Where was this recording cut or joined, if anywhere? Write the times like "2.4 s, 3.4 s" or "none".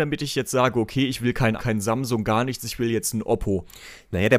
1.6 s